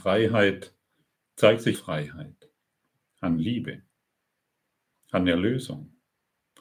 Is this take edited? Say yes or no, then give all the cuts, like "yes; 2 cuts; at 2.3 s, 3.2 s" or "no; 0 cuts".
yes; 1 cut; at 1.7 s